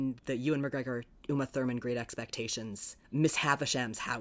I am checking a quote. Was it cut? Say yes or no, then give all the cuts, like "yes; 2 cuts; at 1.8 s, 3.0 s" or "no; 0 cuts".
no; 0 cuts